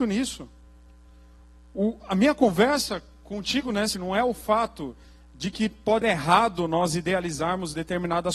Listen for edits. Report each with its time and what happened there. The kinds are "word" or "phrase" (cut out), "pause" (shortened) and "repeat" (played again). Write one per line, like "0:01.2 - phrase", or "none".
0:03.9 - word
0:06.0 - word

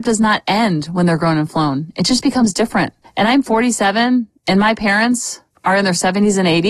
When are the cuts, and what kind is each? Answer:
none

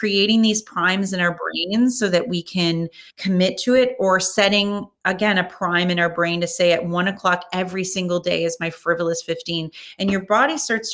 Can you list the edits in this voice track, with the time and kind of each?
0:03.1 - pause

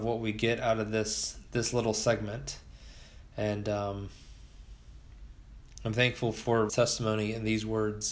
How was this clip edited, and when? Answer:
0:06.7 - word

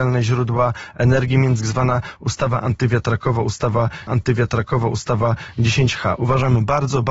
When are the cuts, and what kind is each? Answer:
0:01.6 - phrase
0:04.1 - repeat

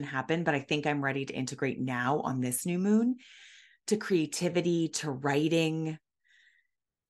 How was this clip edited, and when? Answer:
none

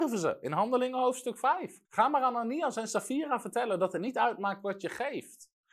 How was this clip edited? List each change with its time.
0:01.8 - pause

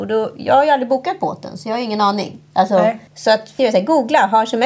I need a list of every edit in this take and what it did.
0:03.1 - pause
0:03.6 - phrase

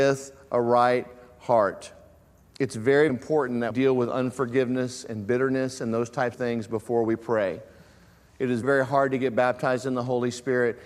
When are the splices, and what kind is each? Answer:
0:02.4 - pause
0:03.1 - word
0:03.7 - word
0:06.3 - word
0:08.6 - word

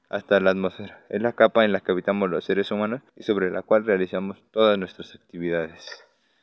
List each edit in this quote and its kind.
0:03.1 - pause

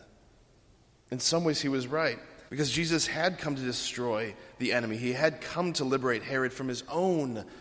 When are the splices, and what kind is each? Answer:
0:02.5 - pause

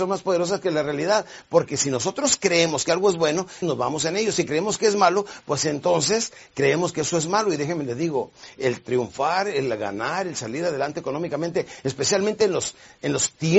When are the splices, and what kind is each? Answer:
0:03.6 - word

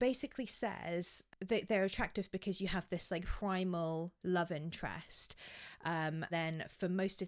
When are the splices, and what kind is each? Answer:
0:03.2 - word
0:06.3 - word

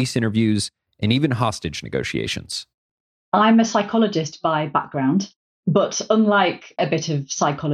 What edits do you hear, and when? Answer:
0:06.8 - word

